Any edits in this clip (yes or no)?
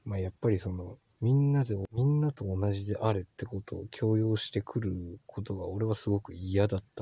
yes